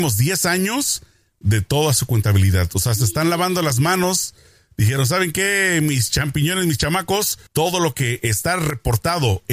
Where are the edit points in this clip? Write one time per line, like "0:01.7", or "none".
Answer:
0:07.5

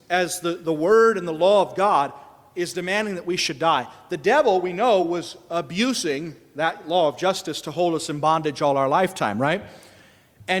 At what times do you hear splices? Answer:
none

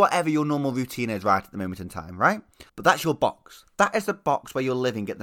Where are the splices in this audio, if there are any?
0:02.7

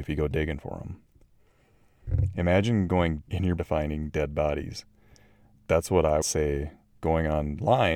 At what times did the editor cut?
0:03.2
0:03.6
0:06.2

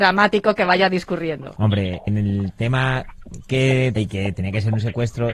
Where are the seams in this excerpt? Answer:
0:02.1
0:04.0

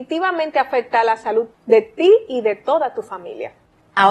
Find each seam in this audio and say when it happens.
0:01.5

